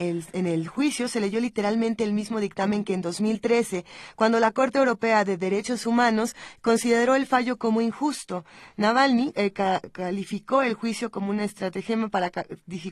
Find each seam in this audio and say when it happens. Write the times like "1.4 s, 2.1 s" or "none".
none